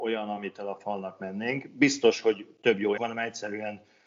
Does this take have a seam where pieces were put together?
yes; 1 cut; at 3.0 s

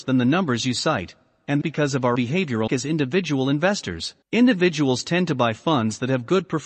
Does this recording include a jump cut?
yes; 4 cuts; at 1.6 s, 2.1 s, 2.7 s, 4.2 s

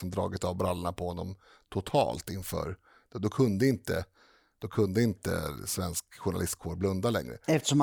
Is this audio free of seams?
yes; 0 cuts

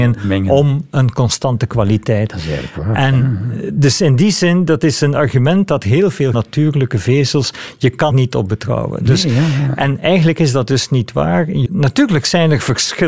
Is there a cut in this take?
yes; 3 cuts; at 6.3 s, 8.1 s, 11.7 s

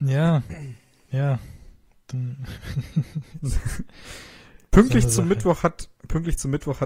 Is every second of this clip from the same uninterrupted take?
yes; 0 cuts

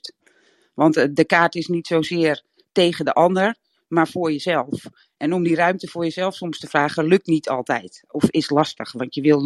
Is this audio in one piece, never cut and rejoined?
yes; 0 cuts

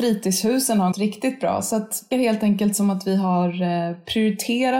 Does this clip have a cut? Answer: yes; 2 cuts; at 0.9 s, 2.1 s

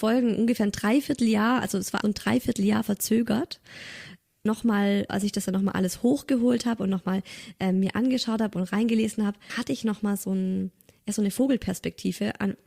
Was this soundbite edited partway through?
yes; 4 cuts; at 2.0 s, 4.5 s, 5.1 s, 9.5 s

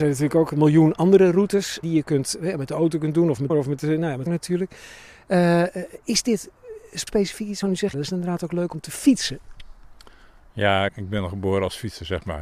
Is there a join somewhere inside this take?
yes; 7 cuts; at 1.8 s, 3.5 s, 4.3 s, 7.1 s, 7.6 s, 7.9 s, 10.9 s

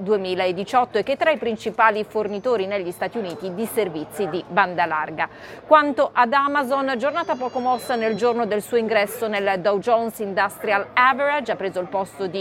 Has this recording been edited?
no; 0 cuts

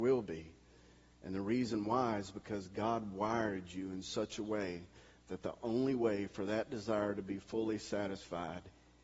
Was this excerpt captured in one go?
yes; 0 cuts

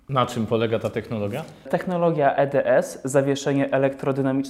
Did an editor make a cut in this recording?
yes; 1 cut; at 2.3 s

